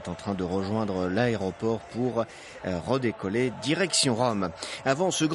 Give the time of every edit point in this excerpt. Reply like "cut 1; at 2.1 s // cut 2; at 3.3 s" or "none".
none